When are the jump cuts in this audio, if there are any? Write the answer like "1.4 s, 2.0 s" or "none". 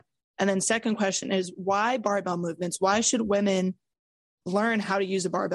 none